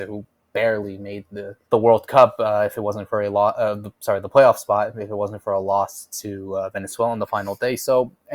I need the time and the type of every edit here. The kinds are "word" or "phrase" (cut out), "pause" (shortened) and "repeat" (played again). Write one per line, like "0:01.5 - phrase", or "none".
0:01.6 - pause